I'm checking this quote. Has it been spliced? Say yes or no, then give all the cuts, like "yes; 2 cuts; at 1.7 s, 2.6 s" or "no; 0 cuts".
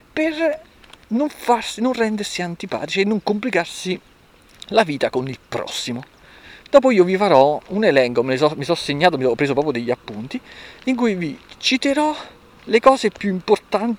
no; 0 cuts